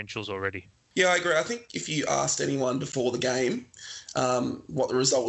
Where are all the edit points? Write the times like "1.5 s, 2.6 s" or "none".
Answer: none